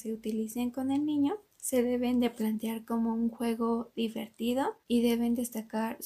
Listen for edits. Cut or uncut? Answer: cut